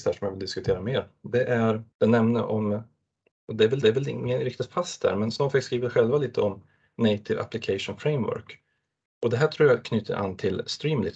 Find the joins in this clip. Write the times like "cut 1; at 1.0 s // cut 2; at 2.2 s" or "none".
cut 1; at 1.9 s // cut 2; at 3.8 s